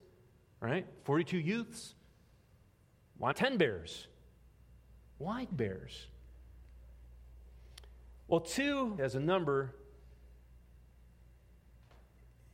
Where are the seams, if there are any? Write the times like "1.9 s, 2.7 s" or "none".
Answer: 3.3 s, 5.5 s, 9.0 s